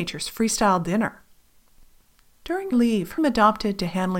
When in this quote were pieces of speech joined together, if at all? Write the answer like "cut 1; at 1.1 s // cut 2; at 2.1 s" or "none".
cut 1; at 2.7 s // cut 2; at 3.2 s